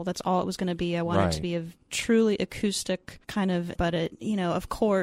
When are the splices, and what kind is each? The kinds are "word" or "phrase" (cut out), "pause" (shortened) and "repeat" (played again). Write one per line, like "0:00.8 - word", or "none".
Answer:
0:01.8 - pause
0:03.2 - pause
0:03.7 - word